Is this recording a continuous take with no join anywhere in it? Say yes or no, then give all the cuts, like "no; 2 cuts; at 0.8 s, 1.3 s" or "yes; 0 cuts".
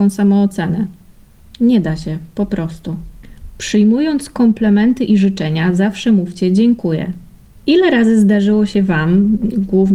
yes; 0 cuts